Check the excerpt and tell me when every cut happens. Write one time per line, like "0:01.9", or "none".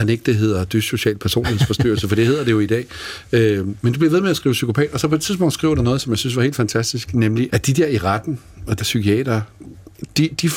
0:07.5
0:08.8